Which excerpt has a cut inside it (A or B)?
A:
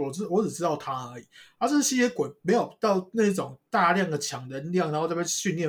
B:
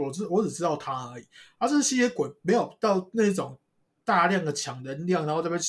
A